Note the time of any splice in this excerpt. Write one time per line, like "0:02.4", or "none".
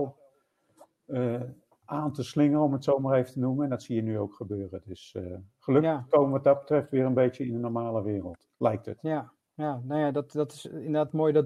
none